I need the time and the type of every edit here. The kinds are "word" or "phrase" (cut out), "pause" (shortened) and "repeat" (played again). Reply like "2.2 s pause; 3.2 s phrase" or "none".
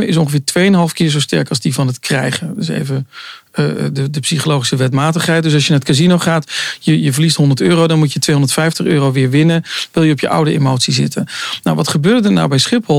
none